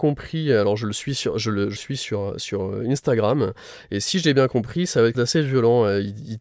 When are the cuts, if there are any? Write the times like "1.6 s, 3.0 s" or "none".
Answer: 1.8 s, 5.1 s